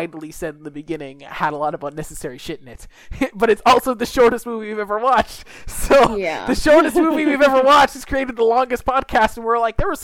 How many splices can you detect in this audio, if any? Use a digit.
0